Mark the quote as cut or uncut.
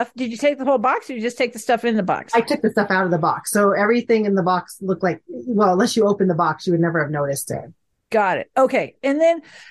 uncut